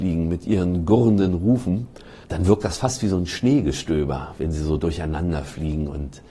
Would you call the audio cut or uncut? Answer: uncut